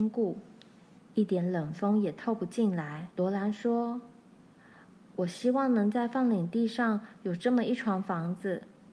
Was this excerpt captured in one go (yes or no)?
no